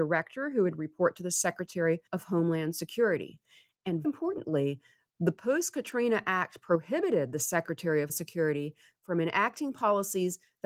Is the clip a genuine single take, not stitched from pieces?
no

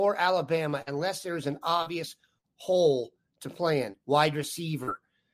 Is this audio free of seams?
yes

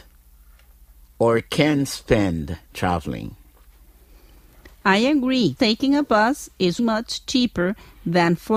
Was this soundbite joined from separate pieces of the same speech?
yes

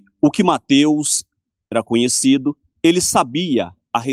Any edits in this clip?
yes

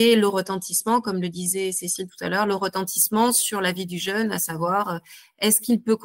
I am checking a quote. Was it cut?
no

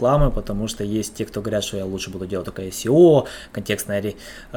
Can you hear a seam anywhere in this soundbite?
no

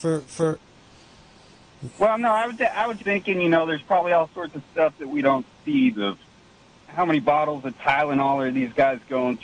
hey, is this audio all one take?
no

